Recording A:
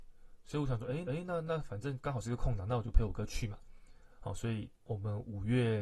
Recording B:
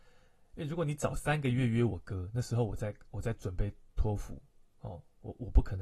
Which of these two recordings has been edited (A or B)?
A